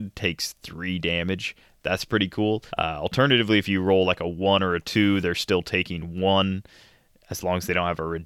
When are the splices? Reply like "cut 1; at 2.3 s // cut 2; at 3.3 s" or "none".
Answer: cut 1; at 2.7 s